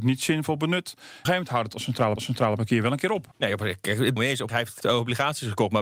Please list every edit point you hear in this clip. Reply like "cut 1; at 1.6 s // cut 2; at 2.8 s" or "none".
cut 1; at 1.3 s // cut 2; at 2.2 s // cut 3; at 3.3 s // cut 4; at 4.2 s // cut 5; at 4.5 s // cut 6; at 4.8 s